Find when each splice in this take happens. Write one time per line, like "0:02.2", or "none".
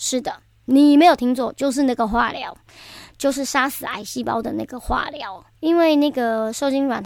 0:05.5